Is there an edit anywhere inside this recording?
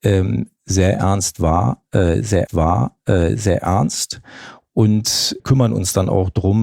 yes; 2 cuts; at 2.5 s, 5.4 s

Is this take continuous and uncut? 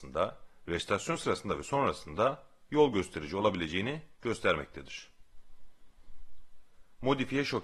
yes; 0 cuts

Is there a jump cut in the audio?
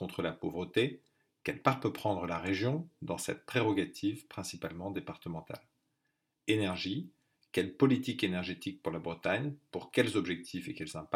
no; 0 cuts

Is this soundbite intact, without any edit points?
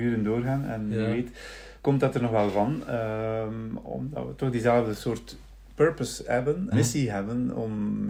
no; 2 cuts; at 1.8 s, 6.7 s

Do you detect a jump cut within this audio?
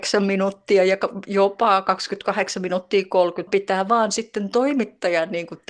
yes; 1 cut; at 3.5 s

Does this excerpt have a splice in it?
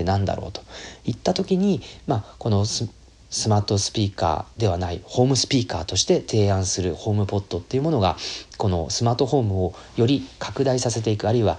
no; 0 cuts

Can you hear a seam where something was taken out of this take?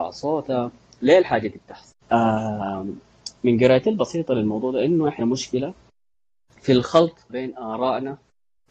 yes; 3 cuts; at 2.0 s, 5.2 s, 7.3 s

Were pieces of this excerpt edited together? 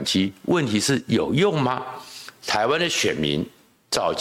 no; 0 cuts

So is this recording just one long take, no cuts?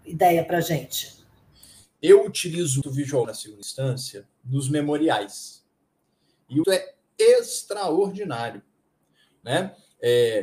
no; 3 cuts; at 2.8 s, 3.2 s, 6.6 s

